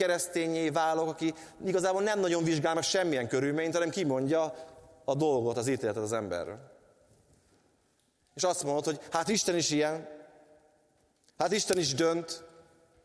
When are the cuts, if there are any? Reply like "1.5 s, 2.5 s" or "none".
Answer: none